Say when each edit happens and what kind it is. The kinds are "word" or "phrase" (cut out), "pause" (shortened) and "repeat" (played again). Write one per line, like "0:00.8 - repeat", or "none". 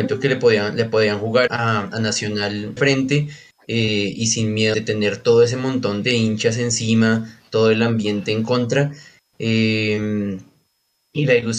0:01.5 - word
0:02.8 - word
0:04.7 - word
0:06.0 - word